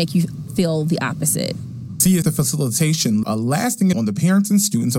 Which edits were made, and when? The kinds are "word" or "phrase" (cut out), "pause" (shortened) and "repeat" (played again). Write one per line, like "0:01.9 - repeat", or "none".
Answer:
0:02.2 - word
0:03.2 - word
0:03.9 - word